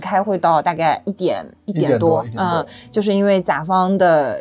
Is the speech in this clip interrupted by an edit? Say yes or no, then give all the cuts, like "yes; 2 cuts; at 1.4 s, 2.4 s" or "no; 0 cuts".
no; 0 cuts